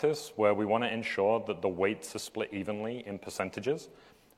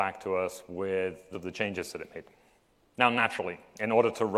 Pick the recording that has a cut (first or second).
second